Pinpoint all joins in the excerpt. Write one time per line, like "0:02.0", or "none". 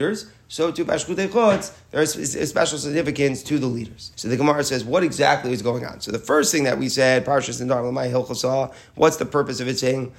0:04.1